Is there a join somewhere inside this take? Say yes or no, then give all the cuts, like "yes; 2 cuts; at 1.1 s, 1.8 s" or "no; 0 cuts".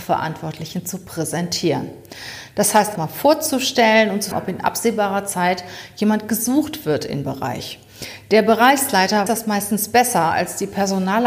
yes; 4 cuts; at 3.0 s, 4.3 s, 7.2 s, 9.3 s